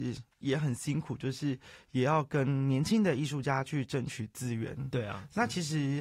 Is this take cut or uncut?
uncut